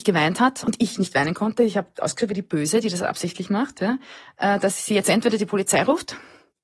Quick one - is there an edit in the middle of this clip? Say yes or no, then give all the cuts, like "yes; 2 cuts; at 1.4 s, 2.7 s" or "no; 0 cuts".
no; 0 cuts